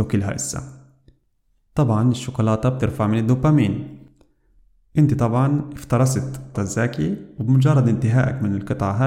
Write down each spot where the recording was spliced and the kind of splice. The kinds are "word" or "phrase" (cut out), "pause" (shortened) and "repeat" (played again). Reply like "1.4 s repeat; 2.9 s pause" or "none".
6.5 s phrase